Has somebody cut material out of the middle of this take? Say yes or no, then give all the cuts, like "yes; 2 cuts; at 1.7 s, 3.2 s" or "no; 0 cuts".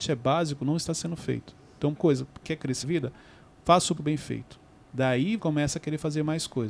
yes; 5 cuts; at 2.0 s, 2.4 s, 2.8 s, 4.0 s, 5.4 s